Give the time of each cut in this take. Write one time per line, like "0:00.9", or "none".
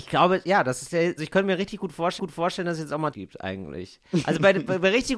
0:01.2
0:02.2
0:03.1